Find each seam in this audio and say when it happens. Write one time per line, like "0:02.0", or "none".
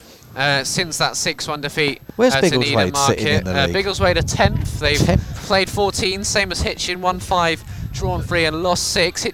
none